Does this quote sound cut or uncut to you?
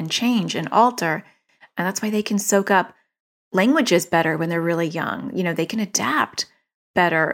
uncut